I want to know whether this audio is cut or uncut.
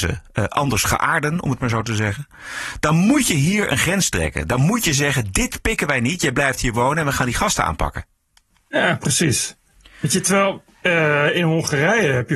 uncut